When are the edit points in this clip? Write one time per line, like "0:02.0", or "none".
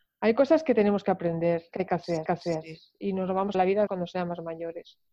0:01.7
0:02.3
0:03.5
0:03.9